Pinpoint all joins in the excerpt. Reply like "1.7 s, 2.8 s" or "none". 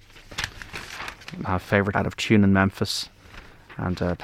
1.4 s, 1.9 s